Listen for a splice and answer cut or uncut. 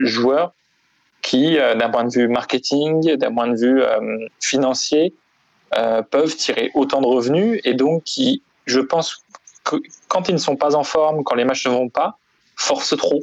uncut